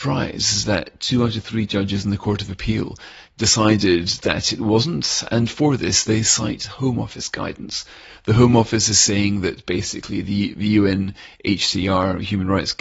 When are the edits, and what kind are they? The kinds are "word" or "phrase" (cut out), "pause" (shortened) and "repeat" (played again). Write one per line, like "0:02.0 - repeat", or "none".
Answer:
none